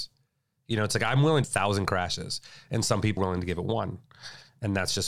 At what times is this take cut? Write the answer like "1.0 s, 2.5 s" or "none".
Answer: 1.4 s, 3.2 s